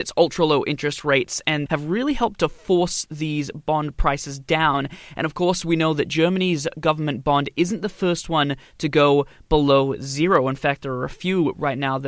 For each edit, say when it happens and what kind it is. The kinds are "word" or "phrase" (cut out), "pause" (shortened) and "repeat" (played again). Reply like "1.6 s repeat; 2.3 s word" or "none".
1.7 s phrase